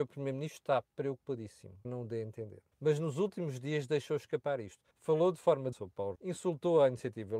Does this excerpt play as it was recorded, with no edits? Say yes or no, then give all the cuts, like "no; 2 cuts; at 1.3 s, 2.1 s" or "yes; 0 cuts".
no; 5 cuts; at 1.8 s, 2.7 s, 4.9 s, 5.7 s, 6.2 s